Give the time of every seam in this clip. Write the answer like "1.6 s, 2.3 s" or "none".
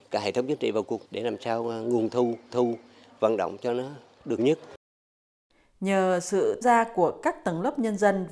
1.0 s, 2.5 s, 4.4 s, 6.6 s

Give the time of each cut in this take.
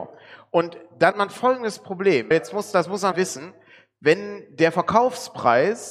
1.1 s, 2.3 s, 3.1 s

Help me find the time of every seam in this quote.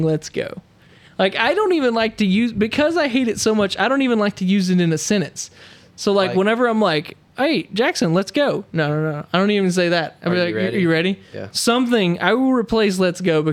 none

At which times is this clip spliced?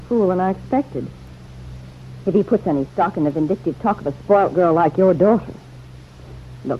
none

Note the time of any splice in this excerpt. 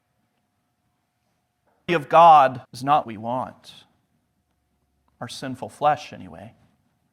1.9 s, 2.6 s, 3.0 s

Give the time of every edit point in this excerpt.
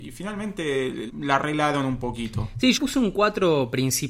1.1 s, 2.8 s

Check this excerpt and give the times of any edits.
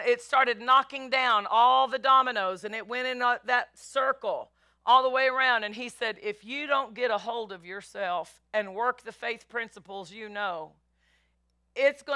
none

